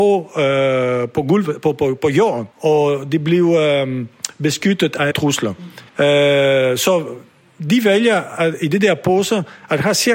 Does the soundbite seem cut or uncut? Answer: cut